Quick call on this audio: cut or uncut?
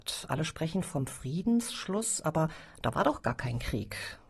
uncut